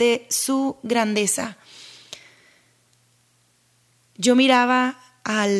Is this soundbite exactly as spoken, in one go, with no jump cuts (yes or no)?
yes